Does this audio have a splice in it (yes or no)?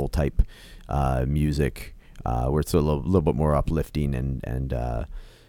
no